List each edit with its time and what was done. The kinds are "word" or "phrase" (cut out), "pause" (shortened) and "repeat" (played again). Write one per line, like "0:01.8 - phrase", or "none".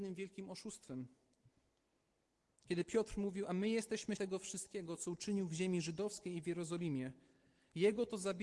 0:04.2 - word

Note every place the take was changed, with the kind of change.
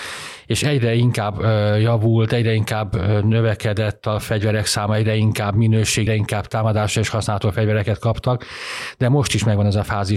0:06.1 - word

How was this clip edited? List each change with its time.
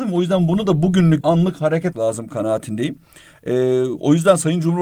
0:01.2 - word
0:01.9 - phrase

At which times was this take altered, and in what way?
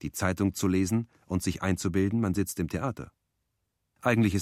none

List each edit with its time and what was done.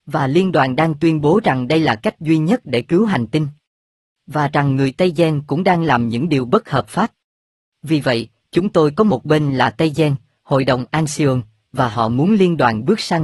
none

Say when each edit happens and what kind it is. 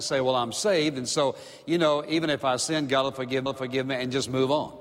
0:03.5 - repeat

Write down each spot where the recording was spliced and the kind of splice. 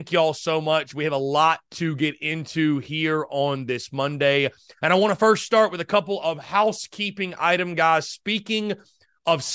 none

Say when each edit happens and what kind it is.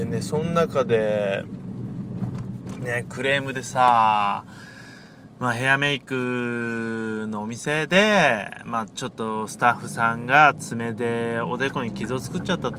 none

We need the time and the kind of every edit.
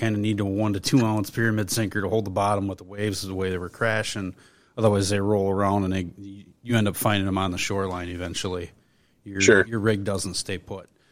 none

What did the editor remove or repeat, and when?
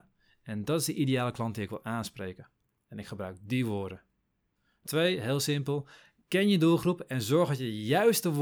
0:04.8 - word

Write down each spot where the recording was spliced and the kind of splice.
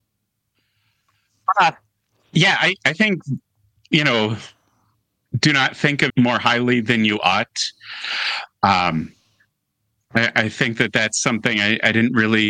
0:06.1 - word

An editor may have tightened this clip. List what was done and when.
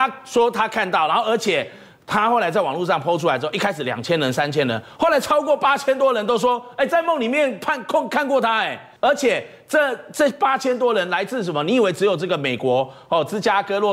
0:09.0 - pause

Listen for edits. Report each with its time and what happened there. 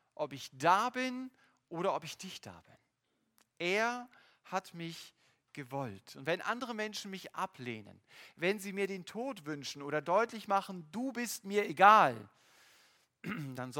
none

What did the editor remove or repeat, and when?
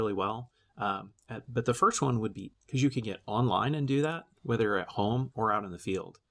0:01.2 - pause
0:02.5 - word

